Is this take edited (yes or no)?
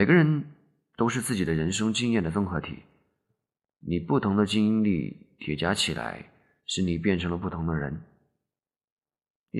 no